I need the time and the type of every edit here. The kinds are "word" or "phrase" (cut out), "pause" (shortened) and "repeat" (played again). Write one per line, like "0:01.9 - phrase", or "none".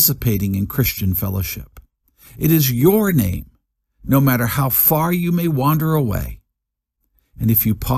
none